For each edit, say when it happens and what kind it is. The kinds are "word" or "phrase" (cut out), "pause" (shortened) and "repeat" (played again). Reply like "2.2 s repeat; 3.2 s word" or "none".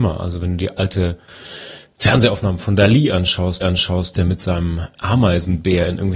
3.6 s repeat; 4.9 s word